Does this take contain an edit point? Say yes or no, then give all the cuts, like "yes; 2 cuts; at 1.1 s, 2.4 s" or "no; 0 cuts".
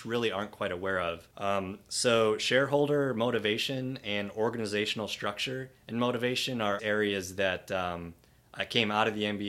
yes; 3 cuts; at 1.3 s, 5.8 s, 6.8 s